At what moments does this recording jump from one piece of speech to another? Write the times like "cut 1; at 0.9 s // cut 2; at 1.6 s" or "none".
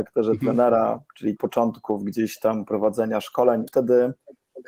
cut 1; at 1.4 s // cut 2; at 3.7 s

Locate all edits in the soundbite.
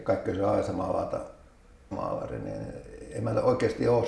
cut 1; at 1.9 s

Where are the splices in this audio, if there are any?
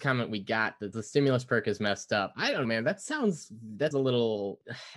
cut 1; at 0.9 s // cut 2; at 2.6 s // cut 3; at 3.9 s

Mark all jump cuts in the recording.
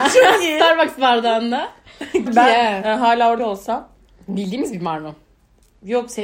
cut 1; at 2.3 s // cut 2; at 3.4 s

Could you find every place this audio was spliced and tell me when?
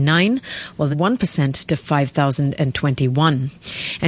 cut 1; at 0.9 s

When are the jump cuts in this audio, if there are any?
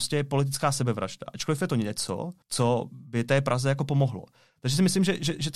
cut 1; at 2.4 s

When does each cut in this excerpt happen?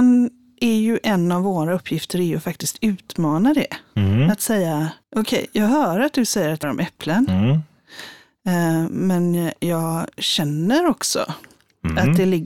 cut 1; at 5.0 s // cut 2; at 6.6 s

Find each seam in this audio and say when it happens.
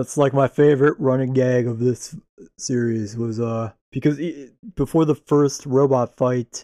cut 1; at 3.8 s

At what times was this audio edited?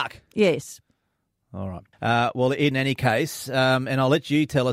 cut 1; at 1.9 s // cut 2; at 2.7 s

